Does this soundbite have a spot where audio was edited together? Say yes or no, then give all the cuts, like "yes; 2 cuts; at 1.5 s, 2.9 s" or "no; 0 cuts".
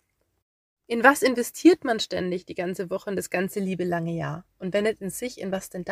no; 0 cuts